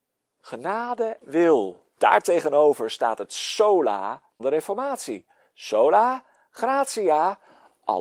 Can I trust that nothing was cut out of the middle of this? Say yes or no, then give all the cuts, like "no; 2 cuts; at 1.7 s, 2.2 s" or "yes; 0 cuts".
no; 3 cuts; at 1.2 s, 1.9 s, 4.4 s